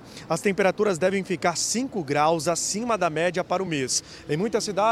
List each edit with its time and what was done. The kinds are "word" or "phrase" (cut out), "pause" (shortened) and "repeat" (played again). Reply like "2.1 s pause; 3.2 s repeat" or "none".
none